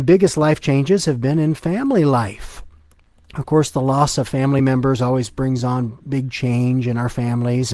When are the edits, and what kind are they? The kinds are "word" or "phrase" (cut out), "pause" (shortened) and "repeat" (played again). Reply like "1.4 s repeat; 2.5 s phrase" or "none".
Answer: none

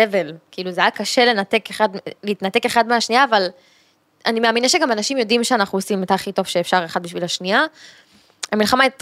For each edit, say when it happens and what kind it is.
none

